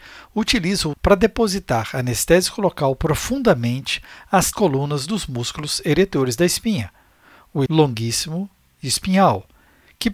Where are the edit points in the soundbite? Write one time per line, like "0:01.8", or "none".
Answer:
0:00.9
0:04.5
0:07.7